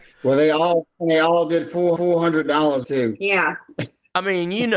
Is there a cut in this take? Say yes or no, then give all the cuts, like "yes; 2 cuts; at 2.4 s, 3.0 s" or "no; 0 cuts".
yes; 2 cuts; at 2.0 s, 2.8 s